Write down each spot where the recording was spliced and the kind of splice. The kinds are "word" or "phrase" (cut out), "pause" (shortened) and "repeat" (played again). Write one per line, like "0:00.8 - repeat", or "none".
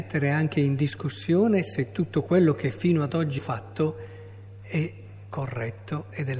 0:03.4 - word